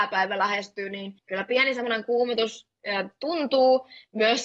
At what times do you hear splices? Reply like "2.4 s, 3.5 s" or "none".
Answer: 1.2 s